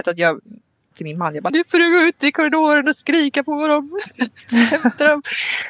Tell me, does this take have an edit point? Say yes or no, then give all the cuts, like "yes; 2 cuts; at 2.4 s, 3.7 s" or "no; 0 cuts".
yes; 2 cuts; at 0.9 s, 1.5 s